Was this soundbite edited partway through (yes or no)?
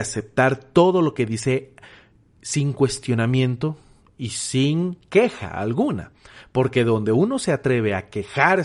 no